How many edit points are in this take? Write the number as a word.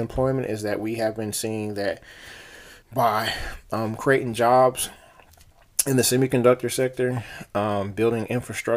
one